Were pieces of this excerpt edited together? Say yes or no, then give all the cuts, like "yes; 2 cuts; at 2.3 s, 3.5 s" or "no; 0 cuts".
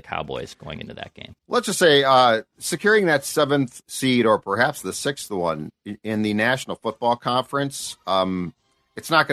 yes; 1 cut; at 1.4 s